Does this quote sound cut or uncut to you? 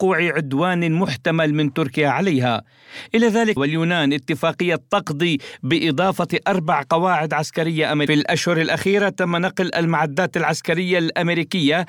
cut